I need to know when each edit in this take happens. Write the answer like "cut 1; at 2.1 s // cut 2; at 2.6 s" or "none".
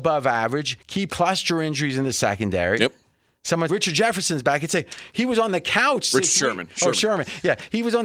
cut 1; at 1.1 s // cut 2; at 3.7 s